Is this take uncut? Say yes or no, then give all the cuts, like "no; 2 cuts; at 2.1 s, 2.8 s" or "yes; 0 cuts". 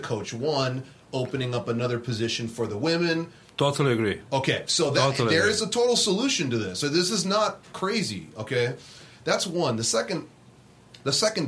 yes; 0 cuts